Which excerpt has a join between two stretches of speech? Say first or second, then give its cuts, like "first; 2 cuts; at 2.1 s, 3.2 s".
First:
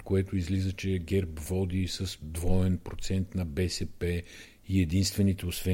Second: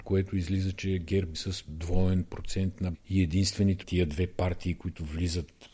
second; 3 cuts; at 1.3 s, 2.9 s, 3.8 s